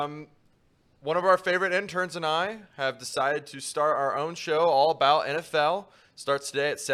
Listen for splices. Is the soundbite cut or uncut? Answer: uncut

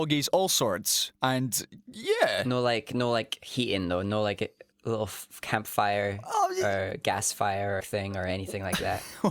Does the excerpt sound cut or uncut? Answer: cut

